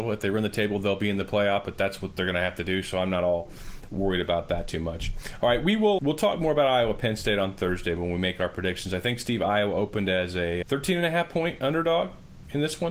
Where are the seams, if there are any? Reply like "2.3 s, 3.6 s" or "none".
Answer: 6.0 s, 10.6 s